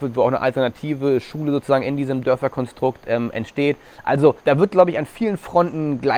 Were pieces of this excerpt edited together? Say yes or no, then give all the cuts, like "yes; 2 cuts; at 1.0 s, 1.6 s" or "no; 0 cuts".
yes; 1 cut; at 4.4 s